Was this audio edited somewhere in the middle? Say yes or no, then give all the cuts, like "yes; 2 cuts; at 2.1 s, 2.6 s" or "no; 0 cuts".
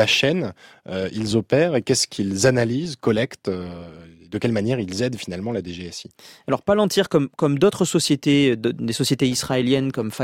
no; 0 cuts